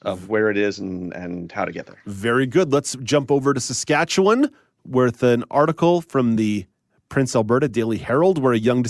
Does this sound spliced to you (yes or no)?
no